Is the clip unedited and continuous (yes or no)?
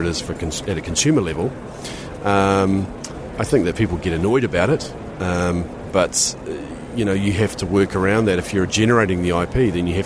yes